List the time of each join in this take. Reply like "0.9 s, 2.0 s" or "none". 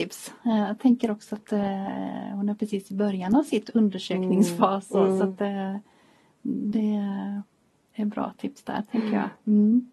none